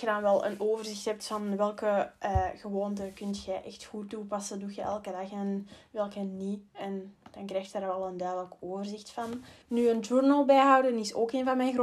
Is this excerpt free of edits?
no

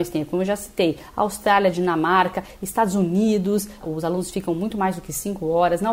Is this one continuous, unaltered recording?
yes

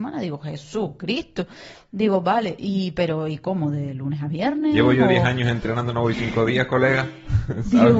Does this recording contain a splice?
no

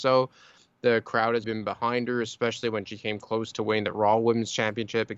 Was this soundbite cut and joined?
yes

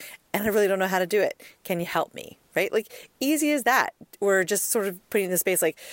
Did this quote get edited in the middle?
no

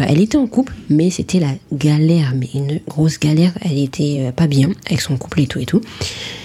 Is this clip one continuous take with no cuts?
yes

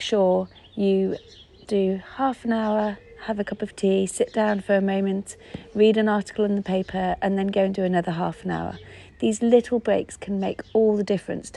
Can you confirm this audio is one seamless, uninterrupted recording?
no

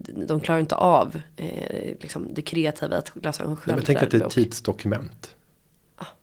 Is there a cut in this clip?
no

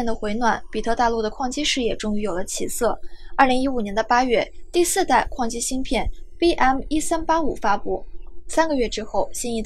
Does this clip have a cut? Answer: no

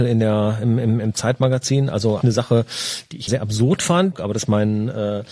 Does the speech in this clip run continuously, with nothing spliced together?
no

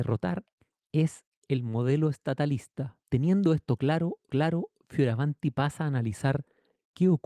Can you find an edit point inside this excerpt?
yes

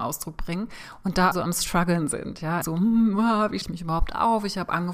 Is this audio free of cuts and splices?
no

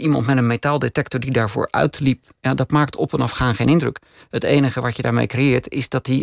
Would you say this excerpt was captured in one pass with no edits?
yes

